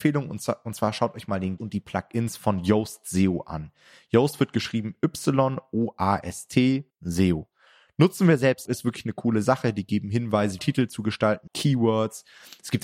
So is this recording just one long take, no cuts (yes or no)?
no